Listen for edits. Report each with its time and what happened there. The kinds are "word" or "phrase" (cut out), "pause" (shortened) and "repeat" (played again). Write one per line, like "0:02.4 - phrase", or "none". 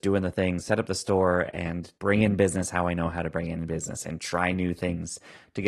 0:02.0 - pause